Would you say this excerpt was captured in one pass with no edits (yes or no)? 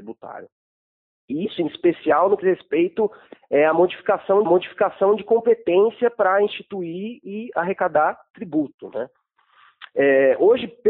no